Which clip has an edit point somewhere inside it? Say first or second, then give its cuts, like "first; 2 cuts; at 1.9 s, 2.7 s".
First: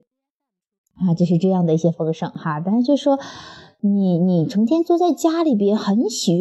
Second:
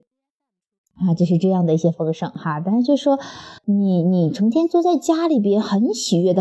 second; 1 cut; at 3.6 s